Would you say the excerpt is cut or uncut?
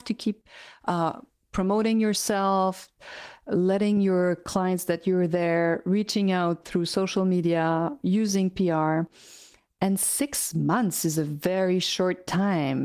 uncut